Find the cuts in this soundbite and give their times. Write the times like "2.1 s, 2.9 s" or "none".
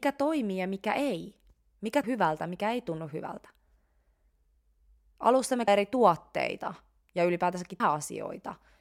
2.0 s, 5.7 s, 7.8 s